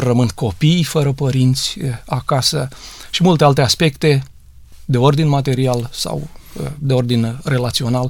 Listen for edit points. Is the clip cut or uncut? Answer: uncut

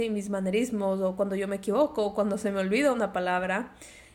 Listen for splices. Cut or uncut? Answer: uncut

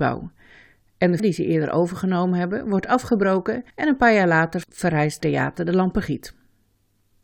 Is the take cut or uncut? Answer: cut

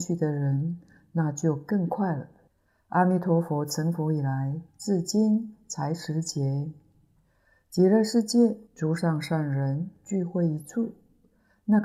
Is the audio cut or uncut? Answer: cut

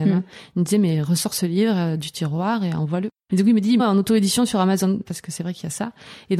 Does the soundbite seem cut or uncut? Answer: cut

